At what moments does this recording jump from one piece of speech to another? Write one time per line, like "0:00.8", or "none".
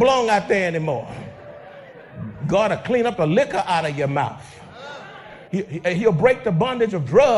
0:05.5